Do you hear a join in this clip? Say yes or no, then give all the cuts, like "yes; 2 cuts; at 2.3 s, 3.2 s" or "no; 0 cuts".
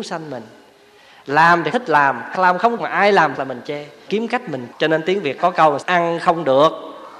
yes; 8 cuts; at 1.7 s, 2.3 s, 2.8 s, 3.3 s, 4.1 s, 4.7 s, 5.4 s, 5.8 s